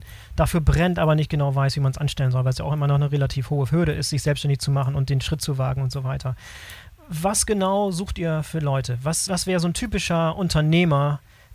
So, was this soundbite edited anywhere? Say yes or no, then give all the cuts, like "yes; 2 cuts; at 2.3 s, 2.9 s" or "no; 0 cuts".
yes; 1 cut; at 9.3 s